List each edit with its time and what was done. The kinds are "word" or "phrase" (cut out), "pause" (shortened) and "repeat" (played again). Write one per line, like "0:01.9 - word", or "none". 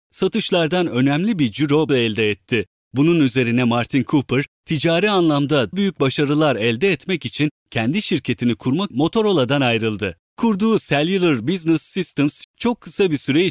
0:01.9 - word
0:05.7 - word
0:08.9 - word
0:12.4 - word